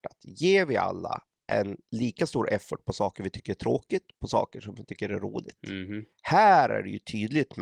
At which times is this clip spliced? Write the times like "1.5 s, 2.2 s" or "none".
1.9 s, 6.1 s